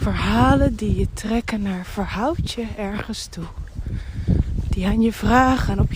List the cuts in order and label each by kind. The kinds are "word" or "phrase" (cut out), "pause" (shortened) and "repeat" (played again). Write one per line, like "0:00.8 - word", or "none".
none